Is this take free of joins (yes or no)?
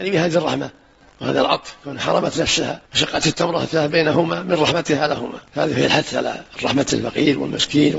no